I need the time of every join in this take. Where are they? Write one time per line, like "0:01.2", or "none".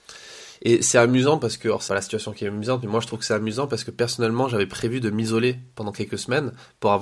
0:01.9